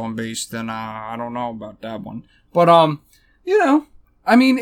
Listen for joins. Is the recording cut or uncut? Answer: uncut